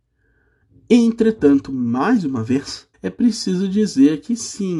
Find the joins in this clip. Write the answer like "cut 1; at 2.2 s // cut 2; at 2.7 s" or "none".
cut 1; at 2.9 s